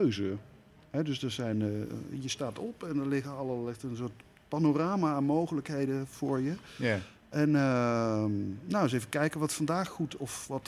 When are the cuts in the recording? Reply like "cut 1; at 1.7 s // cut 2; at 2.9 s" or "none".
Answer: none